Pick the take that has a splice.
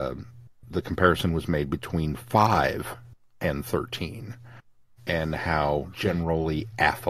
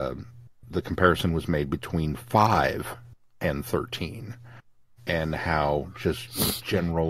first; 1 cut; at 5.9 s

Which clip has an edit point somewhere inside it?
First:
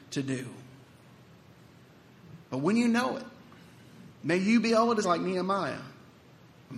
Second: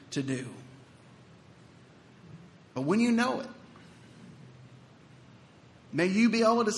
first; 3 cuts; at 2.4 s, 4.1 s, 5.0 s

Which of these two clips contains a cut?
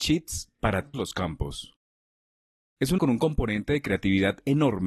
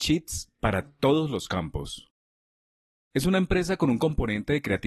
first; 2 cuts; at 0.9 s, 3.0 s

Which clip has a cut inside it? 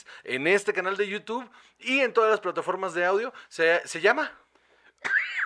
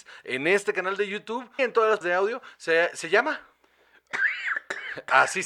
second; 2 cuts; at 1.6 s, 2.0 s

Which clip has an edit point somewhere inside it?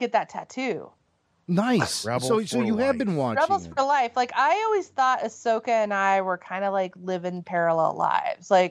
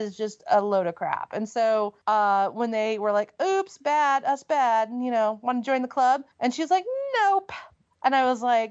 second; 2 cuts; at 2.0 s, 6.3 s

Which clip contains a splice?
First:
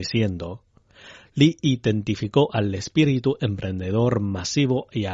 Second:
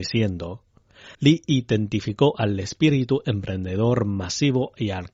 second; 1 cut; at 1.1 s

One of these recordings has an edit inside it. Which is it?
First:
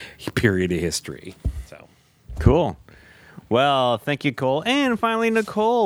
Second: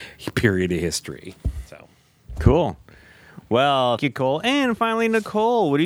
second; 1 cut; at 4.0 s

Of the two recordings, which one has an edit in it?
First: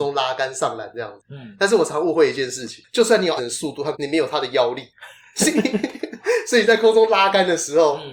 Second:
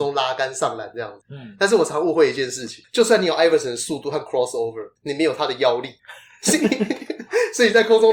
first; 2 cuts; at 3.4 s, 3.9 s

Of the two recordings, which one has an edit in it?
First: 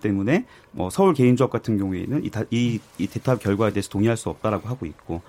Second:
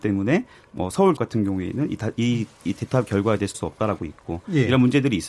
second; 3 cuts; at 1.2 s, 3.5 s, 4.0 s

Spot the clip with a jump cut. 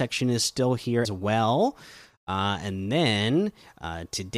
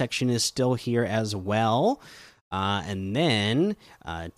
first; 1 cut; at 1.0 s

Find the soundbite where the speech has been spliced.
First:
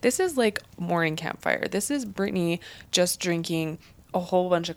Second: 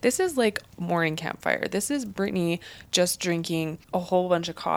second; 1 cut; at 3.8 s

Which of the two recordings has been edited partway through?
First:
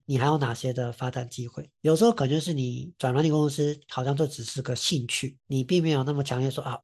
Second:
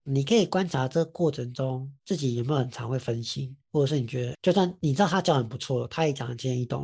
second; 1 cut; at 4.3 s

